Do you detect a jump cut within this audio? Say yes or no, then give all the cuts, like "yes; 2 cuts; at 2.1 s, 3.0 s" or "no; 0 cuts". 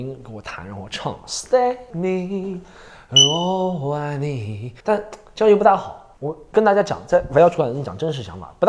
yes; 3 cuts; at 1.9 s, 4.8 s, 6.1 s